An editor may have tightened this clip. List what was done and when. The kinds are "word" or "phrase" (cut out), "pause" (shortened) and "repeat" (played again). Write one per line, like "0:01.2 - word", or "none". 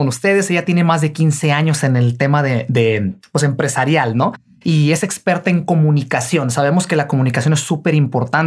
none